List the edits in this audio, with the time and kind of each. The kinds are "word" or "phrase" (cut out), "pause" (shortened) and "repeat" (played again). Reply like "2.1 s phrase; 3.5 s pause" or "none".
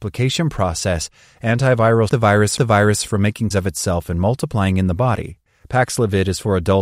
2.1 s word; 2.6 s repeat; 3.5 s word; 5.6 s pause